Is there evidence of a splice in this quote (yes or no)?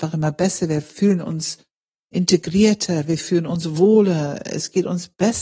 no